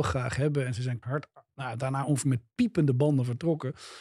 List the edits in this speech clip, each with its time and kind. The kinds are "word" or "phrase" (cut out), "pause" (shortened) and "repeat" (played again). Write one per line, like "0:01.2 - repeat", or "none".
0:01.0 - word

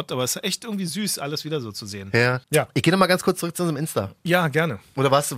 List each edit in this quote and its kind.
0:02.4 - pause
0:04.2 - pause

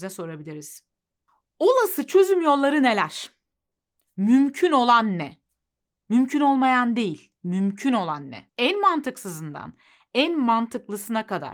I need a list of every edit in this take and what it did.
0:07.4 - pause
0:08.5 - pause

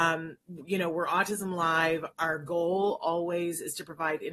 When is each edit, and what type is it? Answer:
0:02.1 - word

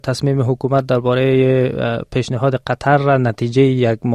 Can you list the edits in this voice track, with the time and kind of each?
none

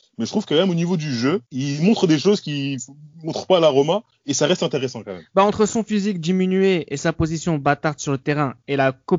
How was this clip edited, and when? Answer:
0:01.5 - pause

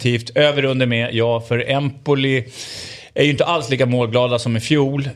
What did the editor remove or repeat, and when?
none

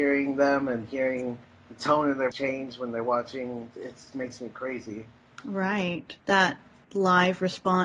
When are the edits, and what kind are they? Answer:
0:01.4 - pause
0:02.3 - word
0:03.7 - word
0:04.1 - word
0:06.2 - pause

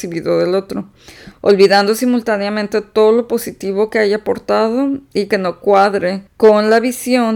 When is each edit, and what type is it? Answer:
0:06.3 - pause

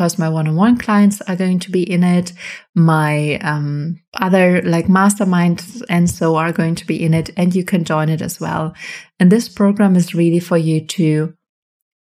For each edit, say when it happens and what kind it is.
0:04.1 - pause

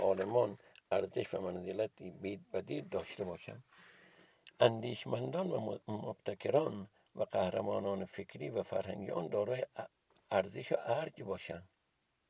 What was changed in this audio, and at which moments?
none

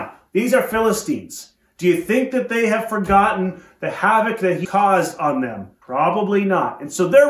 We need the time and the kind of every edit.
0:04.6 - word
0:05.8 - pause

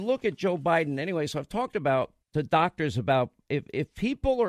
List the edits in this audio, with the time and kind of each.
0:02.2 - pause

